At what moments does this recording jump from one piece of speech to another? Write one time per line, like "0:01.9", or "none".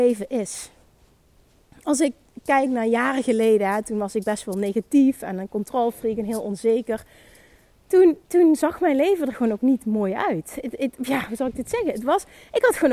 0:08.2